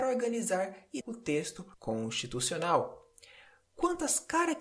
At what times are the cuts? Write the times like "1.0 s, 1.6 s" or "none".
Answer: 1.0 s, 1.7 s